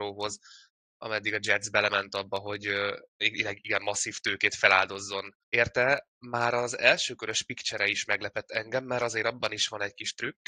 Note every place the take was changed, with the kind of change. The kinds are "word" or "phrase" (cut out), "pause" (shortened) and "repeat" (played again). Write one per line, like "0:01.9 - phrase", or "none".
0:03.1 - pause
0:05.4 - pause